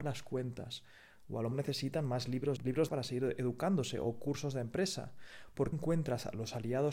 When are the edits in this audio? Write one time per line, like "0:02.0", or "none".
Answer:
0:01.5
0:02.6
0:02.9
0:05.7